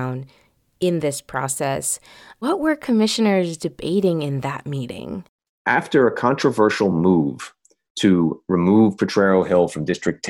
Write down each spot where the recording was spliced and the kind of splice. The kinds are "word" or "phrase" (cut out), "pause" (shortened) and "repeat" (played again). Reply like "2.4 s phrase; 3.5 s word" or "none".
none